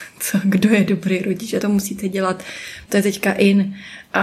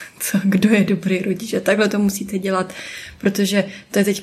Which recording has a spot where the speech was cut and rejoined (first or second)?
first